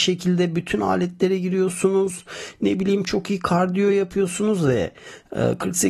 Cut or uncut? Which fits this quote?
uncut